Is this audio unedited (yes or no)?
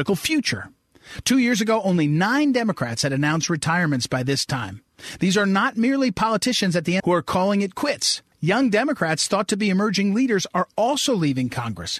no